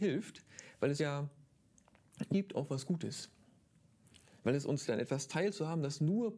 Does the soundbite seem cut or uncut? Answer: cut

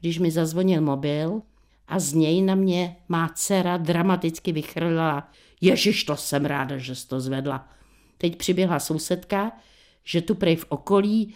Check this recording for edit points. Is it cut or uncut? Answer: cut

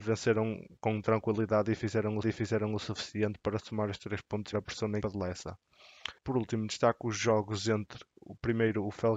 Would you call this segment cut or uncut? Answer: cut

